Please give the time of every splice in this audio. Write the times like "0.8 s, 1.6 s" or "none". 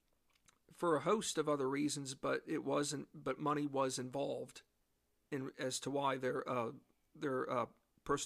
none